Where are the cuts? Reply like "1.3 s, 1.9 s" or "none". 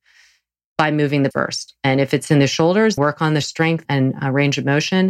1.3 s, 3.0 s, 3.4 s, 3.8 s